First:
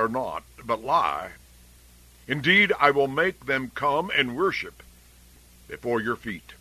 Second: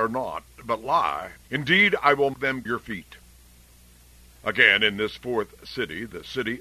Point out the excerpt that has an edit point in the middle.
second; 3 cuts; at 1.4 s, 2.3 s, 2.7 s

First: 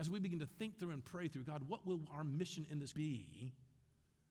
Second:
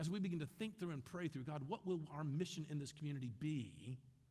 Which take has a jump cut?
first; 1 cut; at 2.9 s

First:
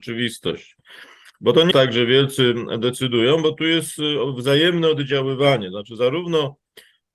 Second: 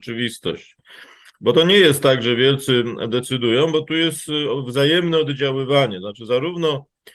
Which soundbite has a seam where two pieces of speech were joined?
first; 1 cut; at 1.7 s

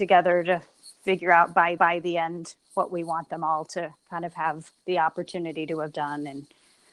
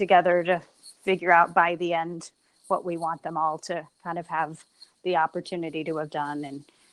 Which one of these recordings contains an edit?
first; 3 cuts; at 1.8 s, 2.6 s, 4.8 s

